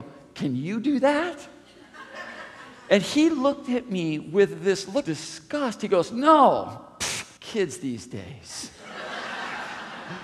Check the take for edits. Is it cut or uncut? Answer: cut